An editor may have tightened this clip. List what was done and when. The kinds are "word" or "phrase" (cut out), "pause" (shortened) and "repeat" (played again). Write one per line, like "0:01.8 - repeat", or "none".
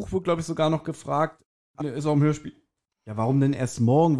0:01.8 - phrase